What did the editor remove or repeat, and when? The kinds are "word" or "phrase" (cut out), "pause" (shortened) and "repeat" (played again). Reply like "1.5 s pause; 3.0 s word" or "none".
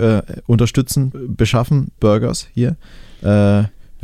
1.1 s word; 2.0 s word

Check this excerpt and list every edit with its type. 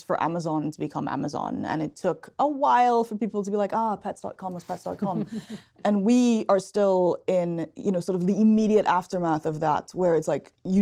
none

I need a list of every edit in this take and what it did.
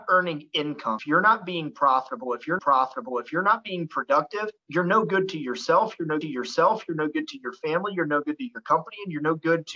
1.0 s word; 2.6 s repeat; 4.6 s pause; 6.2 s repeat

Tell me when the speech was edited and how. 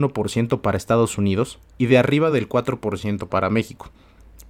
none

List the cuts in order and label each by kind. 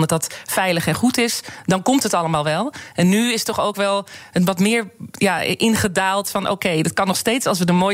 none

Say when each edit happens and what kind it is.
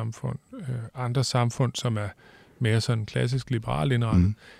none

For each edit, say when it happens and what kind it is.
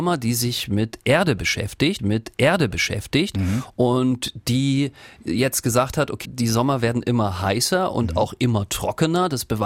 2.0 s repeat; 6.2 s word

